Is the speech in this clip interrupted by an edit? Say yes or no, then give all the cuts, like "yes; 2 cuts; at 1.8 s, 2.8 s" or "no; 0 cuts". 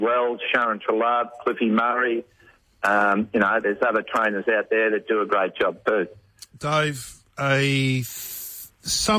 no; 0 cuts